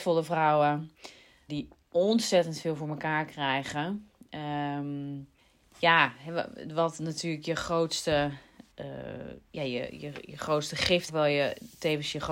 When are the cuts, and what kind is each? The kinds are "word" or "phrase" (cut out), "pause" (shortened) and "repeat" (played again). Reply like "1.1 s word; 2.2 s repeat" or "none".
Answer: 1.5 s word; 5.4 s pause; 8.7 s pause; 11.1 s phrase